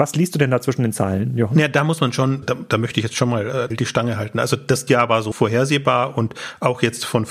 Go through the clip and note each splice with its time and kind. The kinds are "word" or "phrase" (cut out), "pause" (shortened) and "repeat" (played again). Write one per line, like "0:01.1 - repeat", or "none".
0:02.4 - word
0:03.7 - word
0:04.9 - word
0:05.3 - word